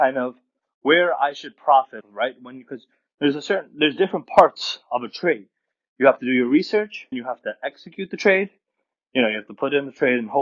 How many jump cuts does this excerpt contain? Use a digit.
2